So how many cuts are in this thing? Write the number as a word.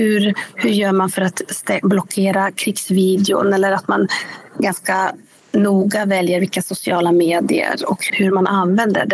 zero